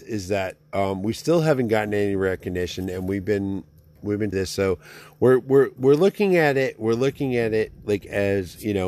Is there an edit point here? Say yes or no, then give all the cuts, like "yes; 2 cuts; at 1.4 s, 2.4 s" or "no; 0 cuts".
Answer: yes; 1 cut; at 4.3 s